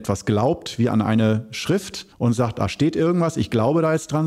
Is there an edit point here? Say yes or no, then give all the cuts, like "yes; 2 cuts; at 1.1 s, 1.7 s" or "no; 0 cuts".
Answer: yes; 1 cut; at 2.1 s